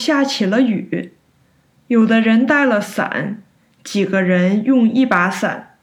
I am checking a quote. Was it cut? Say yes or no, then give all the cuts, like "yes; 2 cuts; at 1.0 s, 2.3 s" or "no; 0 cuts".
no; 0 cuts